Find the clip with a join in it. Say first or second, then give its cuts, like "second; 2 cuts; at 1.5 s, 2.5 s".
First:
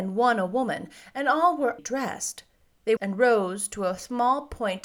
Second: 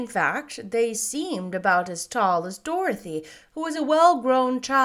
first; 2 cuts; at 1.8 s, 3.0 s